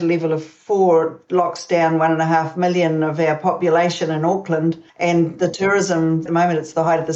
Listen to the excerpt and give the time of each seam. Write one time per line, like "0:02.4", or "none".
0:04.9
0:06.3